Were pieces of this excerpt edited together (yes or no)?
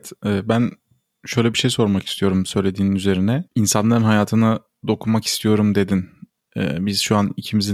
yes